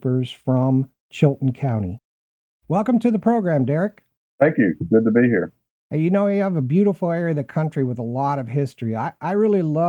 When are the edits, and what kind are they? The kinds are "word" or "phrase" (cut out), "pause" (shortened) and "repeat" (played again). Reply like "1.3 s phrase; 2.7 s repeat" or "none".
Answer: none